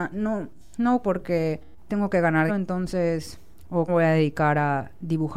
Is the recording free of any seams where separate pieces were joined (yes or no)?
no